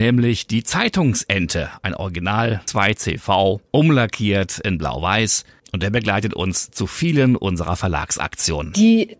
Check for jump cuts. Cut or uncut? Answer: uncut